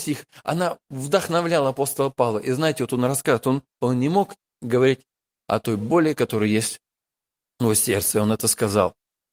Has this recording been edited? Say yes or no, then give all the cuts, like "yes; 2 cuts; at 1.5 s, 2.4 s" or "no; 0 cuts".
no; 0 cuts